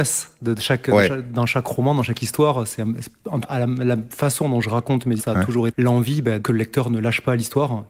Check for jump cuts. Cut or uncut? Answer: cut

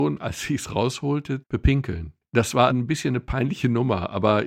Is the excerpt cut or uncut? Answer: cut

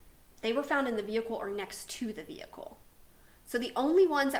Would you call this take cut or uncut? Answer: uncut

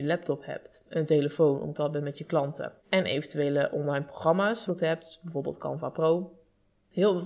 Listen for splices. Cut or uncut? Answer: cut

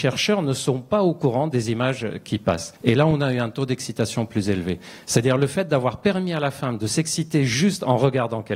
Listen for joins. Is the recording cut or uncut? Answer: cut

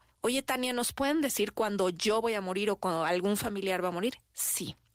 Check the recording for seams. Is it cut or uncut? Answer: uncut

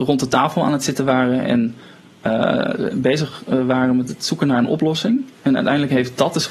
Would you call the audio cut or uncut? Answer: uncut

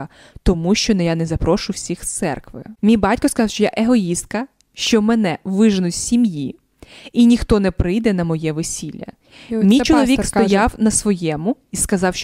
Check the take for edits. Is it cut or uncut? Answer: uncut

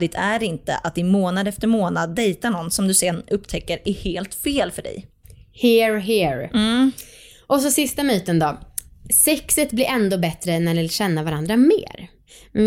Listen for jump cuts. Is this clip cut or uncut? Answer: uncut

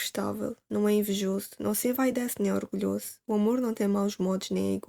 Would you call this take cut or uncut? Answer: uncut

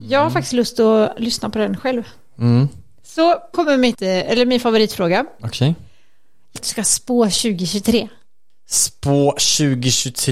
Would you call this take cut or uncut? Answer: cut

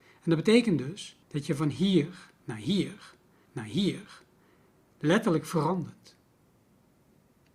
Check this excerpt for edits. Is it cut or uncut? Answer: cut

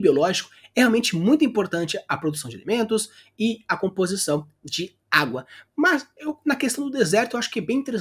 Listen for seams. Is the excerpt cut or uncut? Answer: uncut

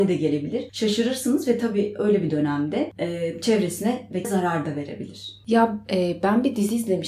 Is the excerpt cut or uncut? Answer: cut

